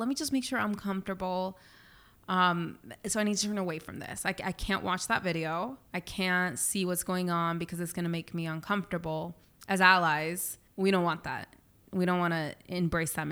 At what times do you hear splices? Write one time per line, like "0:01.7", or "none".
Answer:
0:05.9
0:09.4